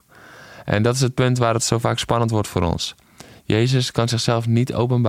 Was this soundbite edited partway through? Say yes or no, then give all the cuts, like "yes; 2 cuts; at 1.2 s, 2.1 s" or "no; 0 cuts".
no; 0 cuts